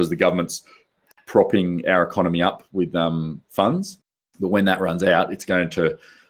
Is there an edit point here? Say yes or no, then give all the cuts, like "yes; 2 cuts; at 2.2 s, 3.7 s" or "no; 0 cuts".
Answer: no; 0 cuts